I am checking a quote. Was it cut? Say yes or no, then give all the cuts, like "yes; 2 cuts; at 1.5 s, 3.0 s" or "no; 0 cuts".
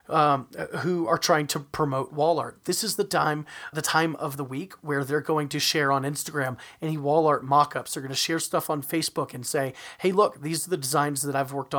yes; 1 cut; at 3.7 s